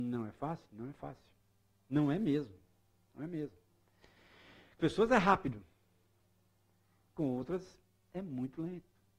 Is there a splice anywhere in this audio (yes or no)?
yes